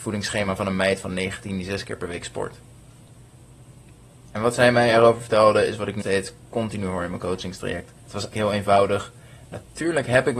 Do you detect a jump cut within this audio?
yes; 4 cuts; at 3.9 s, 6.0 s, 8.0 s, 8.3 s

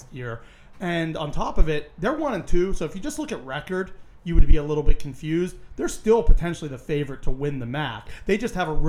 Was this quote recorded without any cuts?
yes; 0 cuts

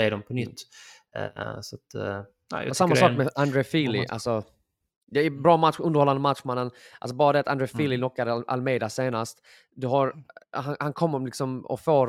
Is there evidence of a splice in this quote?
no; 0 cuts

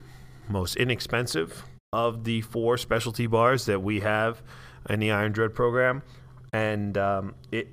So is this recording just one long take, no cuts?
no; 1 cut; at 1.8 s

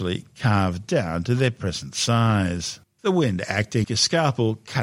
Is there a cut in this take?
yes; 1 cut; at 3.8 s

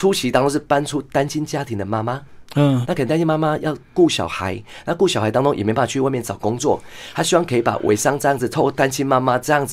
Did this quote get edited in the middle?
yes; 1 cut; at 2.8 s

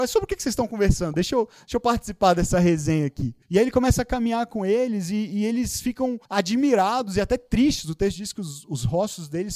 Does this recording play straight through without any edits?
no; 2 cuts; at 3.4 s, 6.3 s

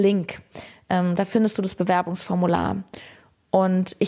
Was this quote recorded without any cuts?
yes; 0 cuts

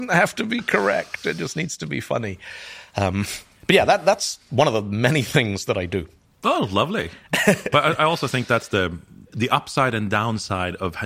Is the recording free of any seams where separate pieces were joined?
yes; 0 cuts

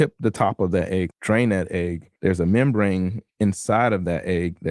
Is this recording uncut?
no; 2 cuts; at 1.1 s, 2.2 s

